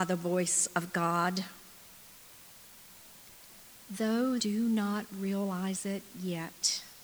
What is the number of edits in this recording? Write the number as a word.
one